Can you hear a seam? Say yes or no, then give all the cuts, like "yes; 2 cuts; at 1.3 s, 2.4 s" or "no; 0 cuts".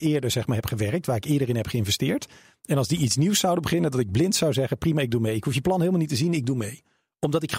no; 0 cuts